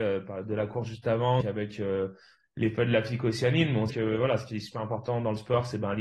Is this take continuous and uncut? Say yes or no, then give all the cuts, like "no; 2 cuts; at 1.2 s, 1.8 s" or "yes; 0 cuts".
no; 2 cuts; at 1.4 s, 3.9 s